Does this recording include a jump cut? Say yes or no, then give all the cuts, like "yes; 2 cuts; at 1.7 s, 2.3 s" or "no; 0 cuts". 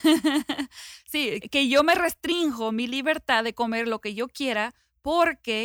yes; 1 cut; at 1.4 s